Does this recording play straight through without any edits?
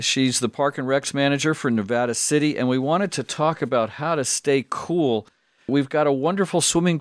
yes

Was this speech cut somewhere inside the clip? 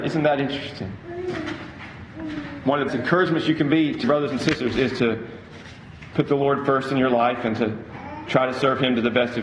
yes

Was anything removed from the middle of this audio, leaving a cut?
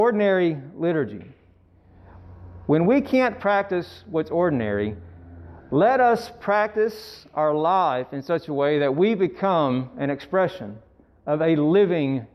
no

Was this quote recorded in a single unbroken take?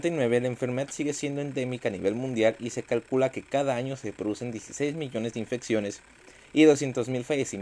yes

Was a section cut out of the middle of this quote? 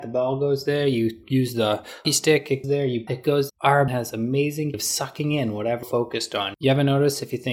yes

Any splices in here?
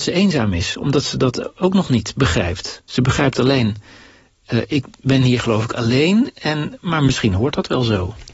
no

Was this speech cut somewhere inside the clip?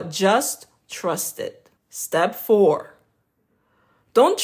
yes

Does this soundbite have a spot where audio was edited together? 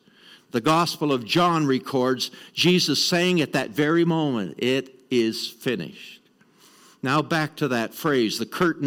no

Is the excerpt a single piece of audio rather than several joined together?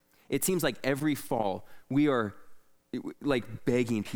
yes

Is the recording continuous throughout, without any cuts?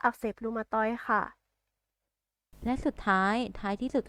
yes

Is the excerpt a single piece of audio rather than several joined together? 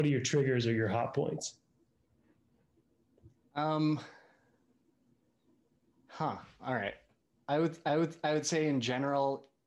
no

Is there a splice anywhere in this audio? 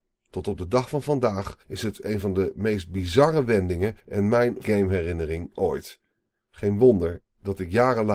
yes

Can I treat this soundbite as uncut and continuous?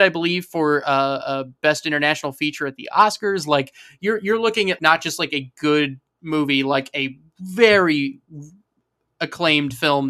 no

